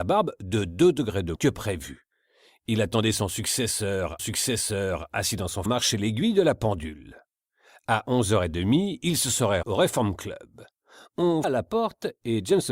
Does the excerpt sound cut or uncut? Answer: cut